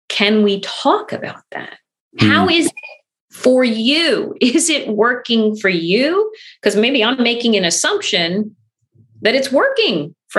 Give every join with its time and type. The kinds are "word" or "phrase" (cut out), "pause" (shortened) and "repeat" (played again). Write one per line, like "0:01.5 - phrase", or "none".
none